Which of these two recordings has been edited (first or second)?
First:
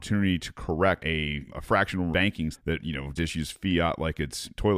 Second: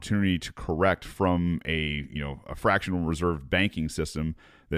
first